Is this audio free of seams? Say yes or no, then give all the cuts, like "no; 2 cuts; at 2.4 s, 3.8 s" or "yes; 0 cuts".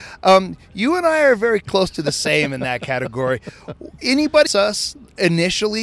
no; 1 cut; at 4.5 s